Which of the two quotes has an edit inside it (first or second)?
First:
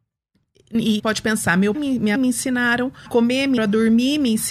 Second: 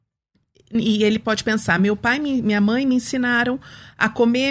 first